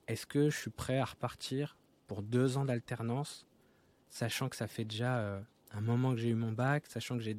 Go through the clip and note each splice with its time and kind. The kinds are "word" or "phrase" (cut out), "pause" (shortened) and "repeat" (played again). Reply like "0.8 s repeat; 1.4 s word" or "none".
none